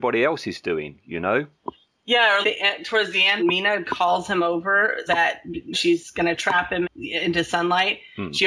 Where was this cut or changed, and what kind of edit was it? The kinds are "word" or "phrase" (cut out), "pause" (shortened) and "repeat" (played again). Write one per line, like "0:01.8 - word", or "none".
0:02.4 - word
0:03.4 - word
0:03.8 - word
0:05.1 - word
0:05.7 - word
0:06.8 - word